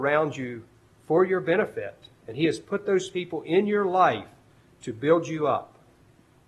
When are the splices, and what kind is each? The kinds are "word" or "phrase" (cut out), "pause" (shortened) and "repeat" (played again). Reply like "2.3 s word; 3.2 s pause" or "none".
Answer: none